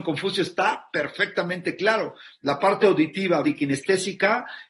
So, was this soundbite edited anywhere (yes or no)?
yes